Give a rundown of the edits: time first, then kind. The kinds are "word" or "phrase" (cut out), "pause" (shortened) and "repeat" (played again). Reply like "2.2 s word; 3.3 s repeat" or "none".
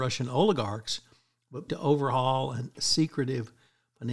1.7 s word; 2.7 s word